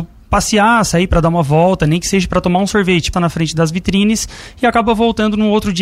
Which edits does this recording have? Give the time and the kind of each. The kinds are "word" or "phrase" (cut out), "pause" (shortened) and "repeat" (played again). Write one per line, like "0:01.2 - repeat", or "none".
0:03.1 - word